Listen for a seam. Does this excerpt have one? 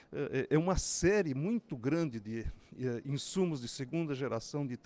no; 0 cuts

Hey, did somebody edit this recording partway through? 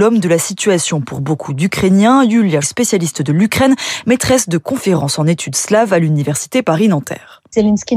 yes; 1 cut; at 2.6 s

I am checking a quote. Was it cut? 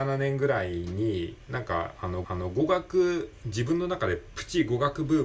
yes; 1 cut; at 2.2 s

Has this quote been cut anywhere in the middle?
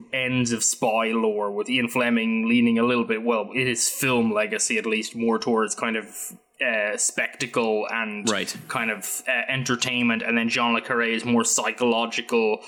no; 0 cuts

